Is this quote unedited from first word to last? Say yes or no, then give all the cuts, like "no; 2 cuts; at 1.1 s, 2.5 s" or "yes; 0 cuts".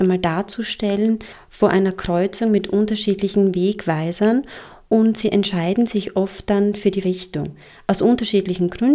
no; 1 cut; at 7.0 s